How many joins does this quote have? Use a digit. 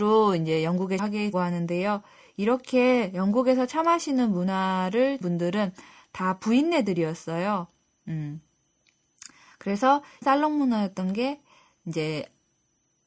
4